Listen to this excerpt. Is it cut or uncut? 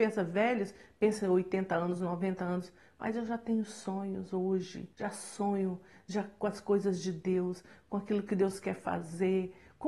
cut